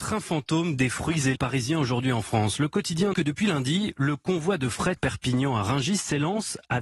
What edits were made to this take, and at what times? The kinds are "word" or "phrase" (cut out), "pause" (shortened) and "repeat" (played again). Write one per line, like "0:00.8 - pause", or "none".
0:01.4 - phrase
0:03.1 - phrase
0:05.0 - word